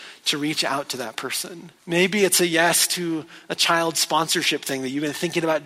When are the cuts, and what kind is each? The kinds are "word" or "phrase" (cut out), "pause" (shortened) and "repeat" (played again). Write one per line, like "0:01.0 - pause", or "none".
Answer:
0:01.8 - pause